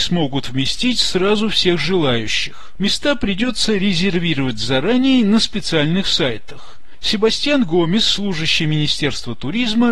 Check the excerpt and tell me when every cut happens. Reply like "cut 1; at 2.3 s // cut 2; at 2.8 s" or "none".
none